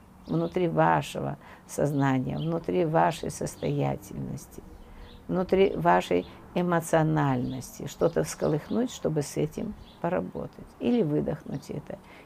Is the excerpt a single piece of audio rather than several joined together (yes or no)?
no